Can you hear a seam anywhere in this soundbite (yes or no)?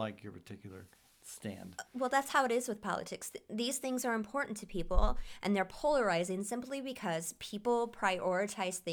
no